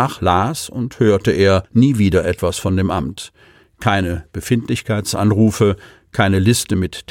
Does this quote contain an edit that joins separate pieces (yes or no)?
yes